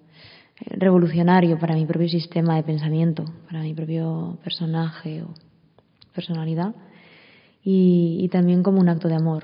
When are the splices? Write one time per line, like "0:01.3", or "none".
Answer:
none